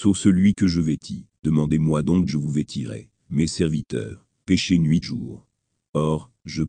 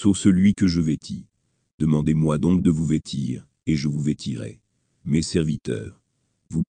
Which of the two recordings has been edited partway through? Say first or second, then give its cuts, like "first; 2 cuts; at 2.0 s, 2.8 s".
first; 5 cuts; at 1.4 s, 2.3 s, 3.2 s, 4.4 s, 5.0 s